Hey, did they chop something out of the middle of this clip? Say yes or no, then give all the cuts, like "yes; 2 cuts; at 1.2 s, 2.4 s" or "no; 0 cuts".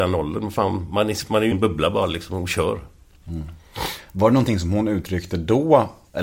yes; 1 cut; at 1.5 s